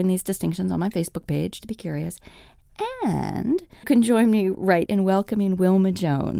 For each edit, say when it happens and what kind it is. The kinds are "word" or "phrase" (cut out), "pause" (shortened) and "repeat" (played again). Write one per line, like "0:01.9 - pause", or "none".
0:01.6 - word
0:03.8 - word
0:04.9 - word